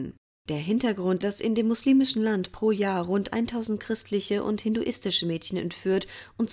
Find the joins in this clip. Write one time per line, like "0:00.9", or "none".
0:01.2